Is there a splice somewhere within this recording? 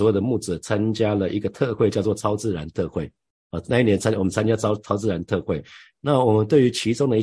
no; 0 cuts

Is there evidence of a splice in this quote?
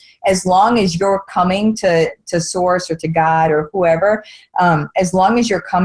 no; 0 cuts

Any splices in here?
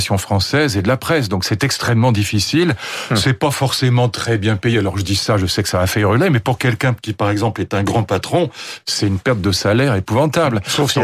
no; 0 cuts

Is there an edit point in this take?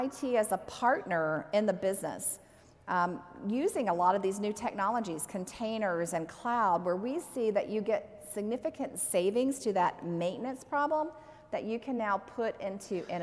no; 0 cuts

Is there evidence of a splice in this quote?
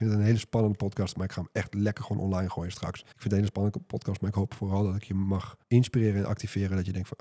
yes; 2 cuts; at 3.1 s, 5.6 s

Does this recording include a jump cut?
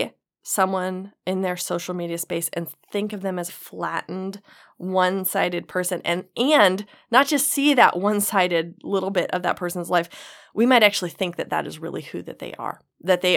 yes; 1 cut; at 3.5 s

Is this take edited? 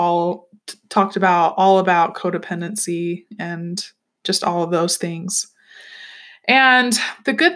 no; 0 cuts

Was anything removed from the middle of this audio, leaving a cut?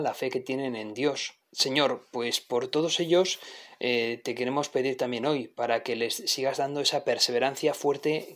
yes; 1 cut; at 1.4 s

